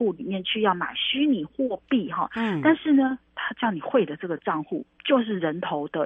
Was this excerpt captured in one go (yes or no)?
yes